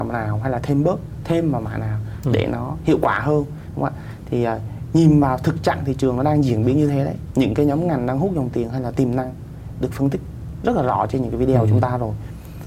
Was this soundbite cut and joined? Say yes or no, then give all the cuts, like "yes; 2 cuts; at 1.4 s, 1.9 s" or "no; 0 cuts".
no; 0 cuts